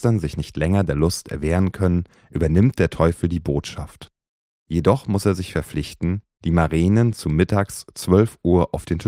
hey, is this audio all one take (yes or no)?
yes